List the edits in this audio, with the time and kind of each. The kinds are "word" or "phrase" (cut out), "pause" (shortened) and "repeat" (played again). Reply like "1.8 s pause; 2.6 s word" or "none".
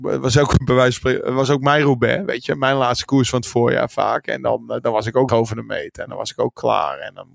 5.3 s word